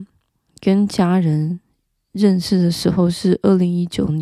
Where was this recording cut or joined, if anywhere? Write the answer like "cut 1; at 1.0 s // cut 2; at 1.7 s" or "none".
none